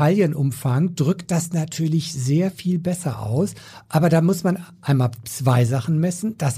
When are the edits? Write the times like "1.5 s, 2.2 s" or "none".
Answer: none